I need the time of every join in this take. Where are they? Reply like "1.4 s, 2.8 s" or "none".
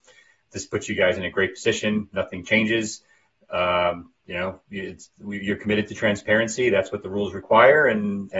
4.2 s